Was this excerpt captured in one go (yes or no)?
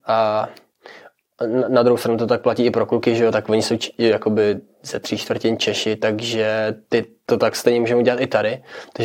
yes